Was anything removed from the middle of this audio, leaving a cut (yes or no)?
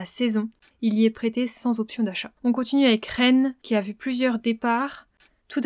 yes